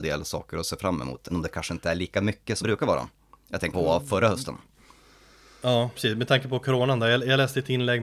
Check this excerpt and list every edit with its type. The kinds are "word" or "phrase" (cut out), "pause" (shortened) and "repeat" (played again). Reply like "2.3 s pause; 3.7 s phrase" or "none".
1.3 s word; 2.6 s word; 3.7 s word; 6.0 s word